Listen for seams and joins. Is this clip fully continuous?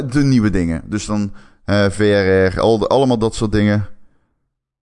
yes; 0 cuts

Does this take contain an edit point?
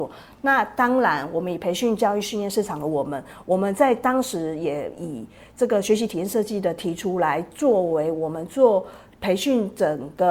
no; 0 cuts

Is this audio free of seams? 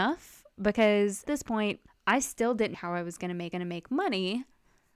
no; 4 cuts; at 1.2 s, 1.9 s, 2.7 s, 3.5 s

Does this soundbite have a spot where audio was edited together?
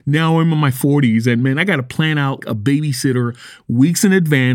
yes; 1 cut; at 2.4 s

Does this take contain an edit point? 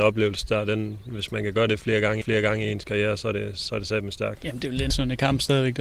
yes; 2 cuts; at 2.2 s, 4.9 s

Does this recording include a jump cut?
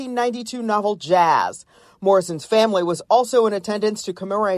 no; 0 cuts

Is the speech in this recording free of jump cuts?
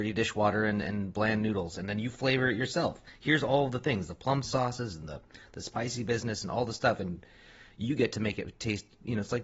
yes; 0 cuts

